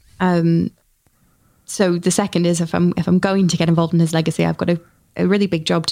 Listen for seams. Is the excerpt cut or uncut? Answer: uncut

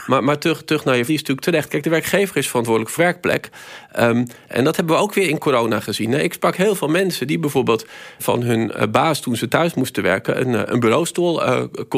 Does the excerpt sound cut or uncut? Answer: cut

